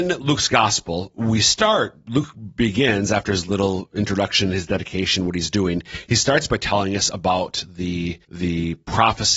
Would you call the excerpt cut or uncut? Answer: cut